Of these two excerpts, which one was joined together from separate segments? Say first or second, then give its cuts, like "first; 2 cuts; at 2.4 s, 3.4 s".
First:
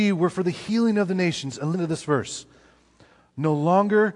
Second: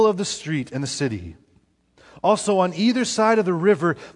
first; 1 cut; at 1.7 s